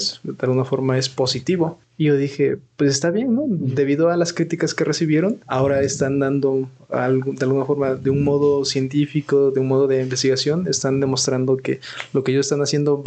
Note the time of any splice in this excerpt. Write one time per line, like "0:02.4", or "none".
0:01.8
0:05.4